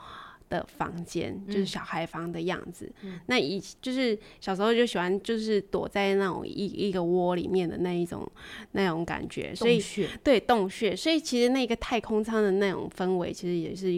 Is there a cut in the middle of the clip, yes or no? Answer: yes